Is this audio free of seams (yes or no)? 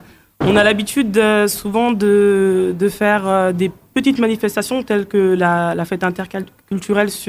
yes